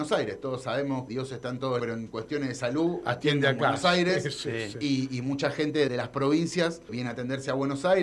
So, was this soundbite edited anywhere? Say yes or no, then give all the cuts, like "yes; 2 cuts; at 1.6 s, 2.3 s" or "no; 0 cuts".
yes; 4 cuts; at 1.1 s, 1.8 s, 5.9 s, 6.9 s